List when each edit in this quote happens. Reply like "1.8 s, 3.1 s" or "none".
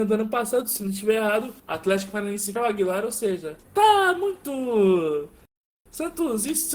1.6 s, 2.6 s, 3.6 s